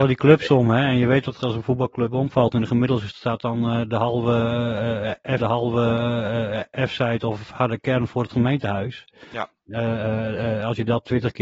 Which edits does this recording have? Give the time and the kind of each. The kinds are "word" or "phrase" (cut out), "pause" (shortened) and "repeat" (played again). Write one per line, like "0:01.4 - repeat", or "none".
0:01.4 - phrase
0:03.1 - word
0:05.4 - repeat

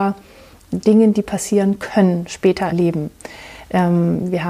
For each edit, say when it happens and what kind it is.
0:02.7 - word

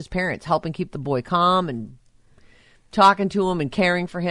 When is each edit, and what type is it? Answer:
none

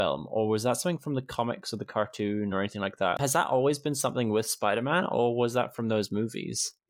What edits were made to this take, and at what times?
none

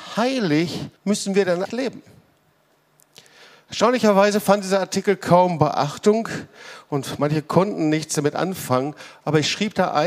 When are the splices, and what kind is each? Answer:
0:01.0 - pause
0:01.7 - word

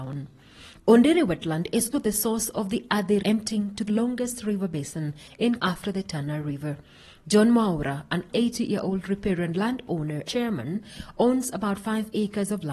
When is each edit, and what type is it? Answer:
0:01.9 - word
0:03.2 - word
0:03.9 - word
0:05.6 - word
0:08.3 - word
0:10.2 - word

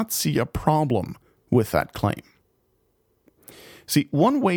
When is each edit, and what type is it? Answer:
none

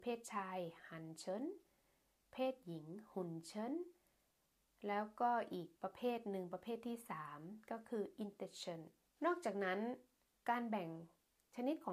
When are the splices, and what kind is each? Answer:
0:05.8 - pause
0:09.2 - phrase

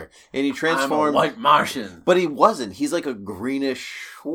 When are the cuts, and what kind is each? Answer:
none

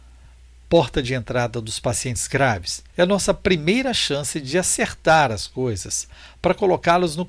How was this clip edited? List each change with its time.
0:02.9 - pause

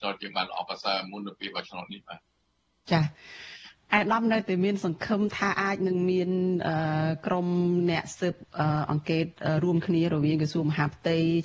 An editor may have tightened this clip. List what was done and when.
0:02.4 - pause

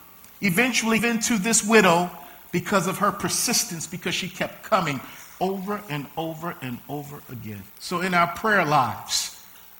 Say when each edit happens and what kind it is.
0:01.0 - word
0:07.7 - pause

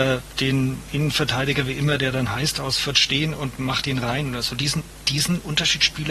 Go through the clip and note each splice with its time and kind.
none

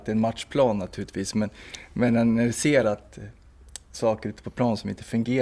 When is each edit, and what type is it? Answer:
none

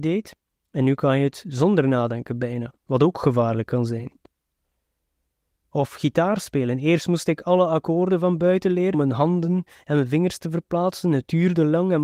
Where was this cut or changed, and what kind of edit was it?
0:08.9 - phrase

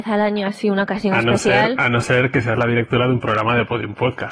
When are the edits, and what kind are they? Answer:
none

